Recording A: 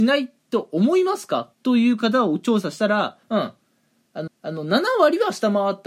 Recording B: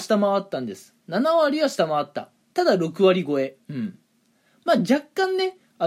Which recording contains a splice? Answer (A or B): A